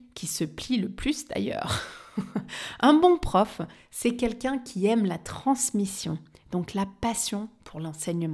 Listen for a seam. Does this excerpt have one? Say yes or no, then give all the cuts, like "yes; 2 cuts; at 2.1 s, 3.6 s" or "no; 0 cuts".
no; 0 cuts